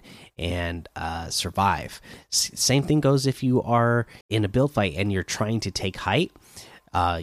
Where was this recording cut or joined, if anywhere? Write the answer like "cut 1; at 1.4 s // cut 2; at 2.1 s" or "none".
cut 1; at 4.2 s